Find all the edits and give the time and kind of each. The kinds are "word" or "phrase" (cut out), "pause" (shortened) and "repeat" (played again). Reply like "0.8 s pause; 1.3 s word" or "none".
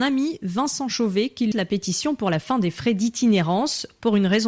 1.5 s word